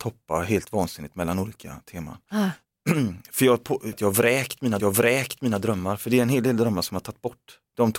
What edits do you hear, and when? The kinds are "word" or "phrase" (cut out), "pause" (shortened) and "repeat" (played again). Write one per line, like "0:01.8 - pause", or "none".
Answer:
0:03.9 - word
0:04.8 - repeat